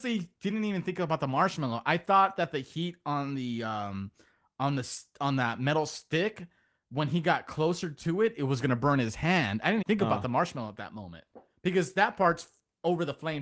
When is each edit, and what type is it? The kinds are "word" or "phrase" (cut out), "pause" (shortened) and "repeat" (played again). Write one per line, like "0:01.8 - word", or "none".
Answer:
0:09.8 - word